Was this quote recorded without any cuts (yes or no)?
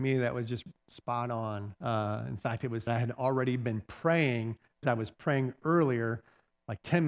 no